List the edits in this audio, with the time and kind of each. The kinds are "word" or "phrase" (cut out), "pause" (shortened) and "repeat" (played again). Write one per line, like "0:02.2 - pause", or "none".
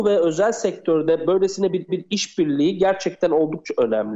0:01.9 - repeat